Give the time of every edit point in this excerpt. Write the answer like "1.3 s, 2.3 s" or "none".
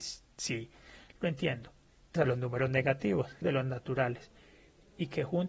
2.2 s, 3.4 s